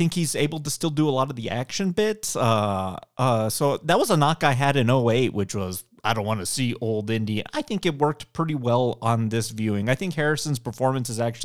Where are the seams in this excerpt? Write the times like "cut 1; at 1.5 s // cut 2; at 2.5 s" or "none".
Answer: none

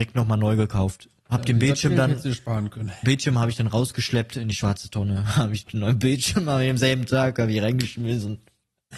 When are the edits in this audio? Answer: none

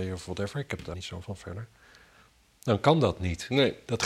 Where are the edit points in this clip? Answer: cut 1; at 0.9 s // cut 2; at 1.2 s

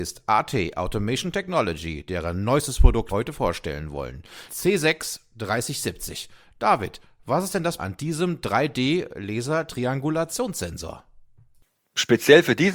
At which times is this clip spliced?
cut 1; at 3.1 s // cut 2; at 4.5 s // cut 3; at 7.8 s

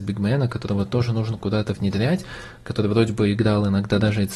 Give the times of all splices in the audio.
none

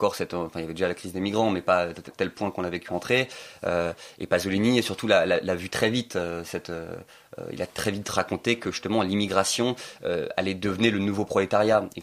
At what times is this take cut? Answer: cut 1; at 2.9 s // cut 2; at 10.0 s

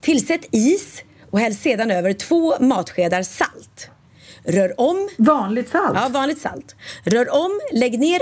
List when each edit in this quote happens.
none

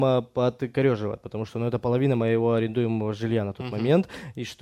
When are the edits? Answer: none

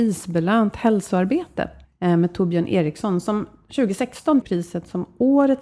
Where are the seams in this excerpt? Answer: cut 1; at 1.8 s // cut 2; at 4.4 s

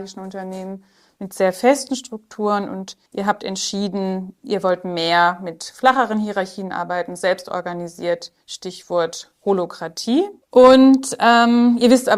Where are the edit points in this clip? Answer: cut 1; at 3.1 s // cut 2; at 4.4 s // cut 3; at 8.4 s // cut 4; at 10.4 s

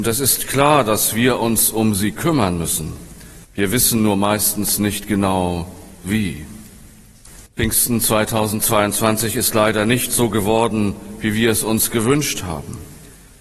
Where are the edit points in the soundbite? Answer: cut 1; at 3.4 s // cut 2; at 7.5 s

